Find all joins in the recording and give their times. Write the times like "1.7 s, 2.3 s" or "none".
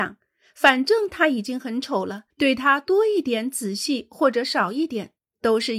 2.3 s